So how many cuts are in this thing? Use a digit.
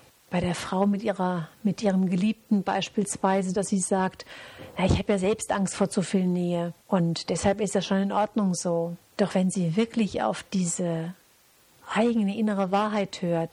2